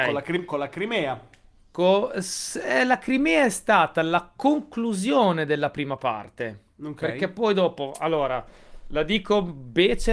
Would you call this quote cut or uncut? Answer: uncut